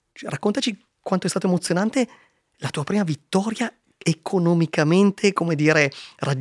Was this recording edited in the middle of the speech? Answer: no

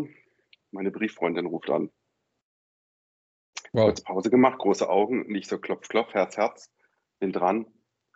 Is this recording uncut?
yes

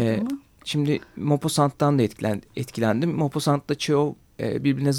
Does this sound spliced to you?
yes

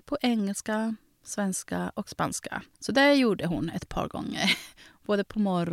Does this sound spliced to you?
yes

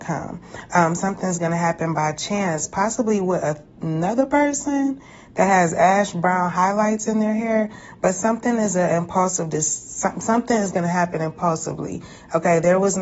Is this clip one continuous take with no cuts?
yes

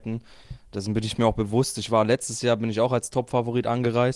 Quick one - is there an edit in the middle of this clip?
no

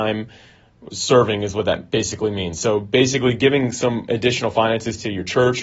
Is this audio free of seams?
yes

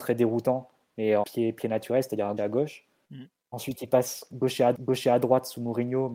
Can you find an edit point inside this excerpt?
yes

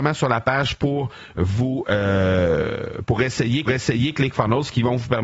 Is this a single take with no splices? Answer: no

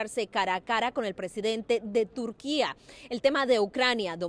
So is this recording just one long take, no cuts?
yes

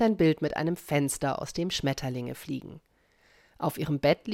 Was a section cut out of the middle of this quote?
no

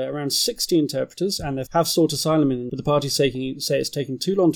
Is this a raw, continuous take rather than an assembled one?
no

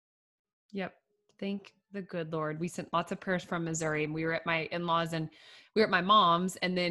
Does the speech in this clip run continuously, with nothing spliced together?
yes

